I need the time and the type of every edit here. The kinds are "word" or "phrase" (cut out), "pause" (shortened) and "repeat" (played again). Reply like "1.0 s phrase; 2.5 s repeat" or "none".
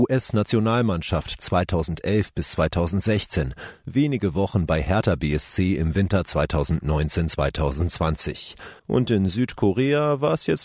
8.8 s pause

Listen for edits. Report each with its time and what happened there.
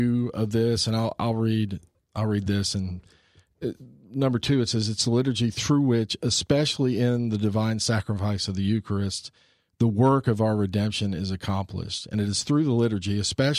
2.0 s word

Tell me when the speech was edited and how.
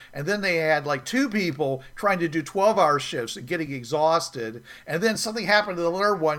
none

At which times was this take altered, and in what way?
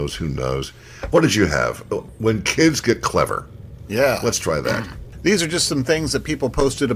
none

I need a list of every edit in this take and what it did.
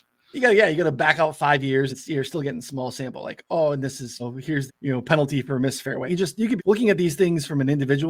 1.9 s word; 4.2 s word; 4.7 s word; 6.1 s word; 6.6 s word

